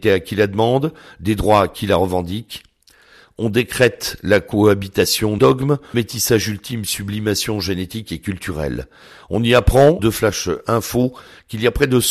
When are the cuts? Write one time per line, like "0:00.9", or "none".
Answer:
0:05.4
0:05.9
0:10.0